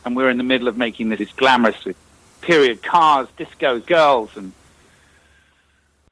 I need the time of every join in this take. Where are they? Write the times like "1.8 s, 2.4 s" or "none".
1.2 s, 1.8 s, 3.3 s, 3.8 s